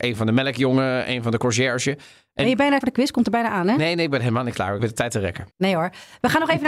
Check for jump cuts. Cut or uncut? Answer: cut